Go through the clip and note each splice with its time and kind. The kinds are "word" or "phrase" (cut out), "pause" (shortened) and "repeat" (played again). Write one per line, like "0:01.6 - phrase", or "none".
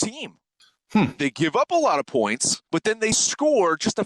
0:02.7 - pause